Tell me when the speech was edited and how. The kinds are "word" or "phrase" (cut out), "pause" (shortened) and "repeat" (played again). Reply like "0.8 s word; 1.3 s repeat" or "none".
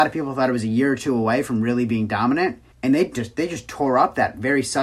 2.7 s pause